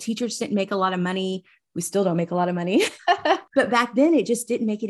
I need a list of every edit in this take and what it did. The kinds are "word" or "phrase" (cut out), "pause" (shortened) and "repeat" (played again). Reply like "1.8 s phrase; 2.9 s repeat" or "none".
none